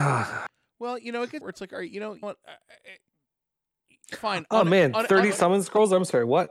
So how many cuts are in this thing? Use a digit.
3